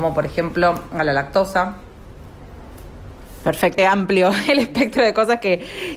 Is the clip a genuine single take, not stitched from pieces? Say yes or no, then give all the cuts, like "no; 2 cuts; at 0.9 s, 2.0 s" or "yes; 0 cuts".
no; 1 cut; at 3.8 s